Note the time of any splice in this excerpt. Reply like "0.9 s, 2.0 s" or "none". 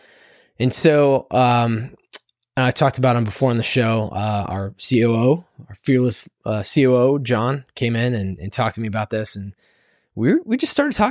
none